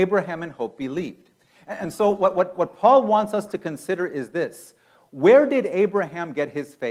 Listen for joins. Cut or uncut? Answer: uncut